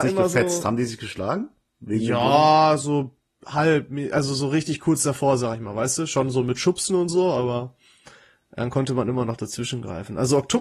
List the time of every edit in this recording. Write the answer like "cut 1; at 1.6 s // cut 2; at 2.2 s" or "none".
none